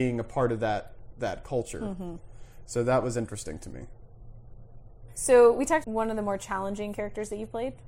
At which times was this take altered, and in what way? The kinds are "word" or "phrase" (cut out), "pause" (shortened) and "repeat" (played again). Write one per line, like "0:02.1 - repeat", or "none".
0:05.8 - word